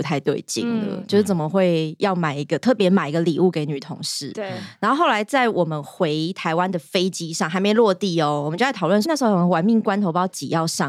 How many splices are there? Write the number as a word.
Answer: one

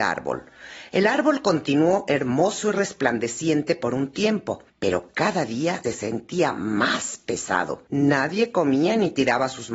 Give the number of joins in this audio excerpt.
three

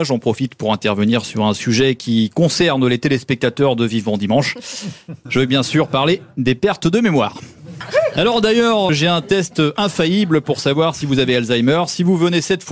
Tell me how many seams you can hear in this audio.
one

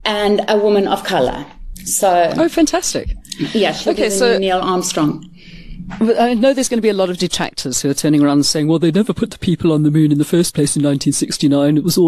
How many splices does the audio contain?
zero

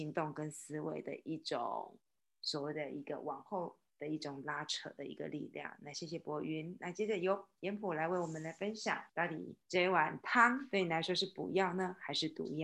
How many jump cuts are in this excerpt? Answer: two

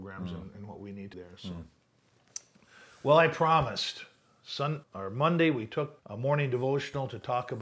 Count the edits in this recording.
three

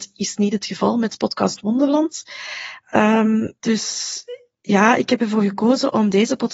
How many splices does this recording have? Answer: one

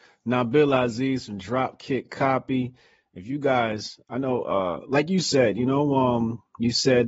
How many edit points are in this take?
zero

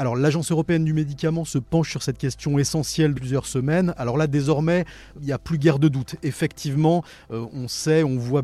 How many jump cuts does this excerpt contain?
two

